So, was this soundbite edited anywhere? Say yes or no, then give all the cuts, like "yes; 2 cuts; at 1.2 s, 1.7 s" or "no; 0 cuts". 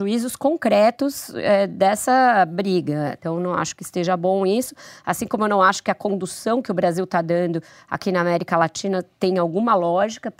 no; 0 cuts